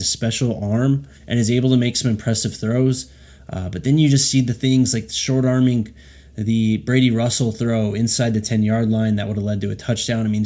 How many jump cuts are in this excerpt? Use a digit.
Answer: 1